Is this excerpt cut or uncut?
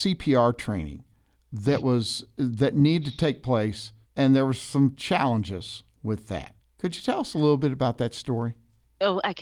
uncut